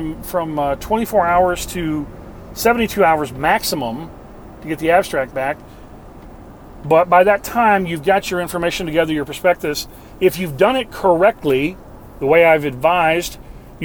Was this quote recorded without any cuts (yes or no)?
yes